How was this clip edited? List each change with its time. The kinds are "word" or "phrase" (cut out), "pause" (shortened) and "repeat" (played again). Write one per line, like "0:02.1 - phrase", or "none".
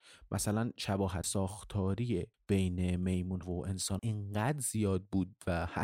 0:01.2 - word
0:02.3 - pause
0:03.4 - word
0:04.0 - word